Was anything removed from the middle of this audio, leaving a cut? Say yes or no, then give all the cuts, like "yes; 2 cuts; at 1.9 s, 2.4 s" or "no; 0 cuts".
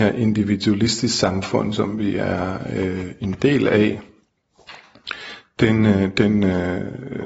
no; 0 cuts